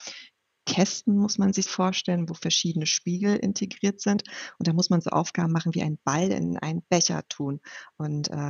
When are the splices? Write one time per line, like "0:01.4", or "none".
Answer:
0:01.7